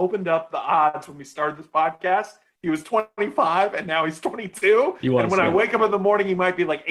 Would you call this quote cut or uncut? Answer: uncut